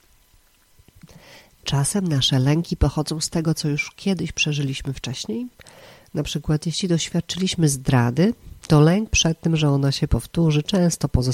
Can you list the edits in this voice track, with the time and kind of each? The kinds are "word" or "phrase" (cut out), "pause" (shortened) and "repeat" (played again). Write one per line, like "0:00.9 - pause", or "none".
none

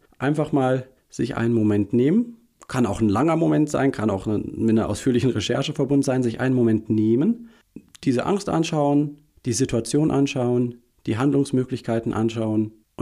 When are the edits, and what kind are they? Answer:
none

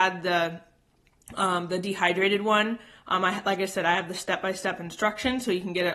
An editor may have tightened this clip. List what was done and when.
none

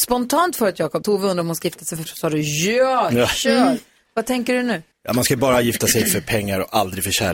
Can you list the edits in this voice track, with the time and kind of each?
0:01.0 - phrase
0:02.1 - word
0:04.9 - pause

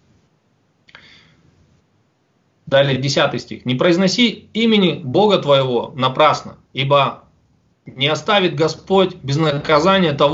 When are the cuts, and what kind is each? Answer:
0:05.0 - word
0:06.6 - pause

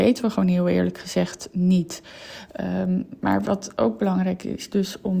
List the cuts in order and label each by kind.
none

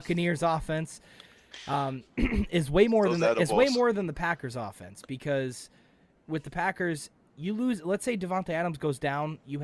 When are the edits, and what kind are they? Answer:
none

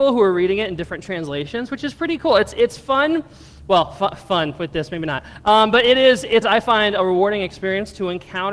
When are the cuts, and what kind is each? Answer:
0:06.4 - word

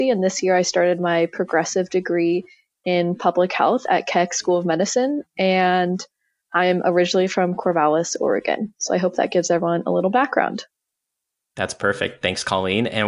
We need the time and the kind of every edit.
none

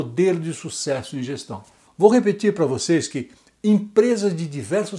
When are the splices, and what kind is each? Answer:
none

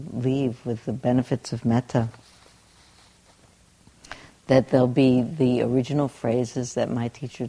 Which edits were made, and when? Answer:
none

